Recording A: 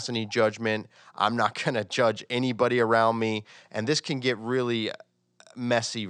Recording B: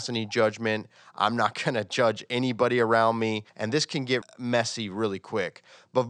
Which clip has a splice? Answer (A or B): B